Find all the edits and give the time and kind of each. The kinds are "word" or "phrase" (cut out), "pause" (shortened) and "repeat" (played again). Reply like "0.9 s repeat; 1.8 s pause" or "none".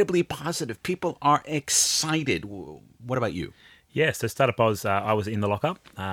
none

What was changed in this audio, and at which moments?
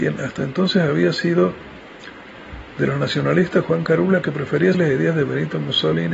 4.7 s word

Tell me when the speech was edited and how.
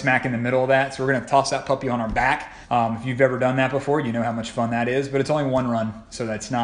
2.6 s pause

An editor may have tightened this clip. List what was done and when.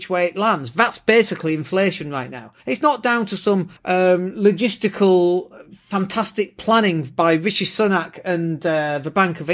2.6 s pause; 3.8 s pause

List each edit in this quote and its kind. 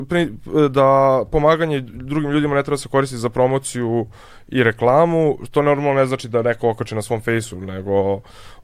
none

